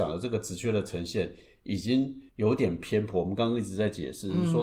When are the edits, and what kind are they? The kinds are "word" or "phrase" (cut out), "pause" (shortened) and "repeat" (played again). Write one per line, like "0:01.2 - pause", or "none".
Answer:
0:02.3 - pause